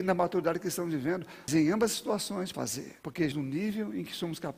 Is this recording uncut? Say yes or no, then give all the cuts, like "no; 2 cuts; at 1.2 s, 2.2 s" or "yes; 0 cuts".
no; 4 cuts; at 1.5 s, 2.5 s, 3.0 s, 3.3 s